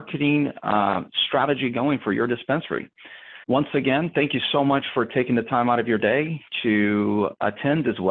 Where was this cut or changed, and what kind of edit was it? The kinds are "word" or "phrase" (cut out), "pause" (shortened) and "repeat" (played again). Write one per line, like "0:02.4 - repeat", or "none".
0:03.4 - pause